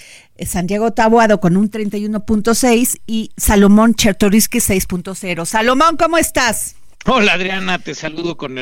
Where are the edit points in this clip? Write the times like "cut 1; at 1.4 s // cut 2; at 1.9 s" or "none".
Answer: cut 1; at 6.9 s